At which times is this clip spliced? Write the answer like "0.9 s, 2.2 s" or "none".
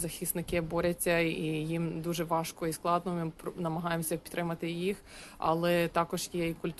none